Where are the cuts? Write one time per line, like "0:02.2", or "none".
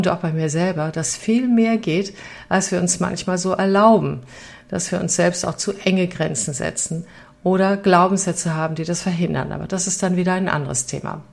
none